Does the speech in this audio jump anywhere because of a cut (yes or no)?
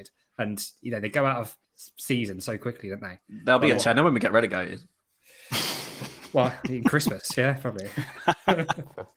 yes